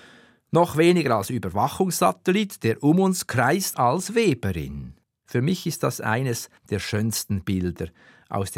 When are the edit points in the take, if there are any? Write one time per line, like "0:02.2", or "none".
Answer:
0:03.7
0:05.0
0:06.6

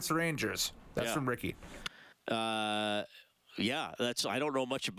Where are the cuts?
0:02.1

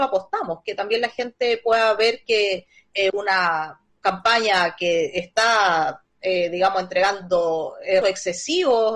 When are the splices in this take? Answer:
0:03.9
0:08.0

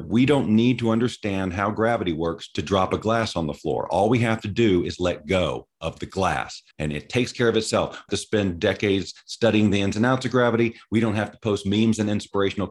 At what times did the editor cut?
0:06.7
0:08.1

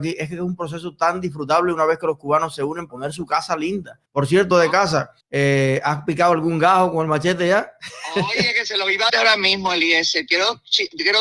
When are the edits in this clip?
0:02.9
0:04.1
0:04.5
0:05.2
0:09.1

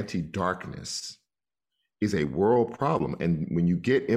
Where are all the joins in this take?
none

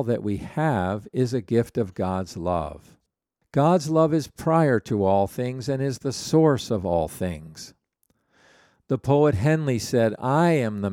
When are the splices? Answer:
none

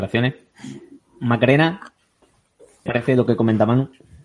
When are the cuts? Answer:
0:02.9

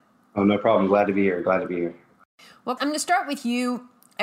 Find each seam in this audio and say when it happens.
0:02.8

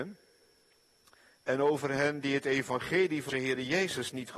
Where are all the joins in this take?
0:03.3

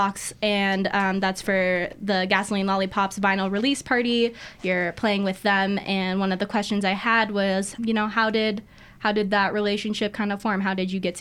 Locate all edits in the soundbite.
0:07.8

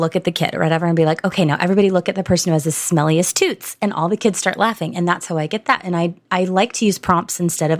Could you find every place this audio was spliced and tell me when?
none

